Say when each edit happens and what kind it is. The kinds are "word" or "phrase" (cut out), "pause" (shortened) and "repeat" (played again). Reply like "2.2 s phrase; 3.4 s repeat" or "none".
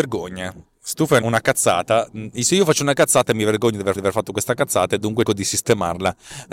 1.2 s word; 3.9 s repeat; 5.2 s word